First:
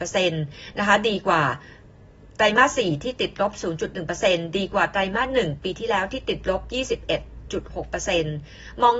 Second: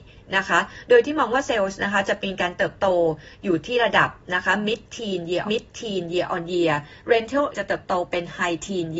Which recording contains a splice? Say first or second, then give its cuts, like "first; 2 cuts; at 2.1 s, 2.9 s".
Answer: second; 2 cuts; at 5.5 s, 7.5 s